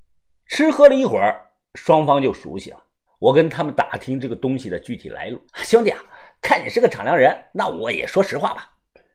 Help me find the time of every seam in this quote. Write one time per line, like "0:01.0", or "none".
0:03.1
0:05.5
0:07.5